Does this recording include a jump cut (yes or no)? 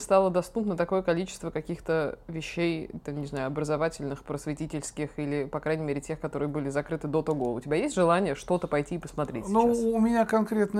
no